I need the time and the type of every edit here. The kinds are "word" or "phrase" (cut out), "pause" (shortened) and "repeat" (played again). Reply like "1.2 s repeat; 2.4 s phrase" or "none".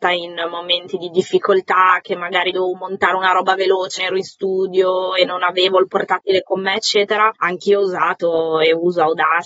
4.0 s word; 7.4 s pause